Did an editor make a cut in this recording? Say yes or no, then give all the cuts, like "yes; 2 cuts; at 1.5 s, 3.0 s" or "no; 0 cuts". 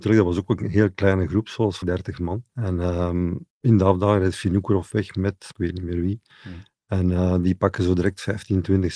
yes; 4 cuts; at 1.8 s, 2.5 s, 3.5 s, 5.5 s